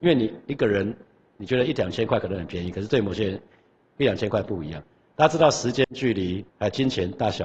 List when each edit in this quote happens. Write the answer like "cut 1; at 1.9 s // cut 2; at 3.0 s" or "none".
cut 1; at 6.5 s